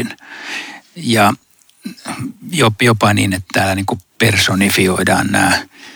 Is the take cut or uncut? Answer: uncut